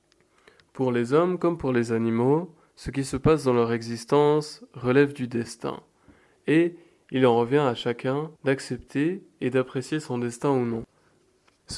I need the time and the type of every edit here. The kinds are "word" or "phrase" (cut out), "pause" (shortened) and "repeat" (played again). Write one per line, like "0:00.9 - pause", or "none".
0:08.4 - pause